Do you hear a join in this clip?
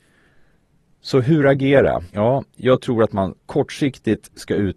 yes; 2 cuts; at 2.1 s, 3.4 s

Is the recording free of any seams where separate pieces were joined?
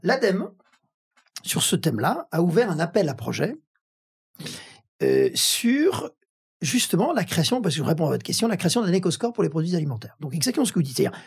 yes; 0 cuts

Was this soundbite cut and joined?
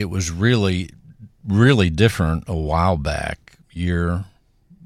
yes; 1 cut; at 3.6 s

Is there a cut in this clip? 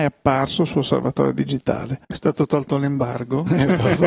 yes; 1 cut; at 2.0 s

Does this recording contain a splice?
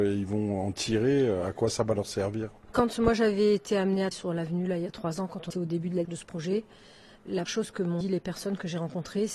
yes; 6 cuts; at 2.7 s, 4.1 s, 5.5 s, 6.0 s, 7.5 s, 8.0 s

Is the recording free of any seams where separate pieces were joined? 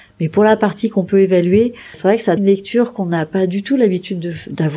no; 2 cuts; at 1.9 s, 2.4 s

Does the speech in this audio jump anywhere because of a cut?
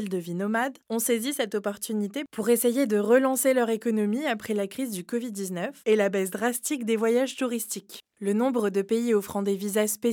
yes; 1 cut; at 5.8 s

